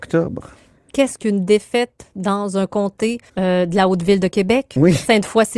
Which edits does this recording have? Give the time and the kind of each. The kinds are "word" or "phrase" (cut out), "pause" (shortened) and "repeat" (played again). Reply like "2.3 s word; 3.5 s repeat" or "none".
3.3 s pause